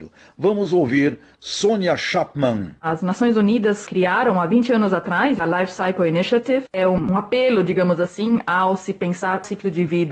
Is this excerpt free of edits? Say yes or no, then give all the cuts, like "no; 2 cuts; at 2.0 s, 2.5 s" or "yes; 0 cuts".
no; 1 cut; at 2.8 s